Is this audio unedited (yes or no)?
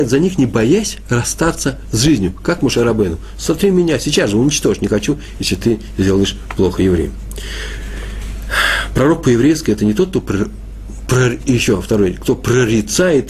yes